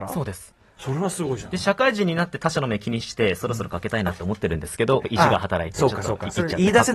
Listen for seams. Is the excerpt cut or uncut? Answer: cut